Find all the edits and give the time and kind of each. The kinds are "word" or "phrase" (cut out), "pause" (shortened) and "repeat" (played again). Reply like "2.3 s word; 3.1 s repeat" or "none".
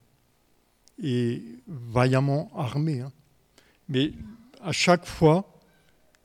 none